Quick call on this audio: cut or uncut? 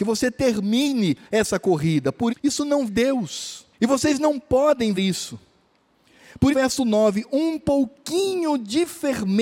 cut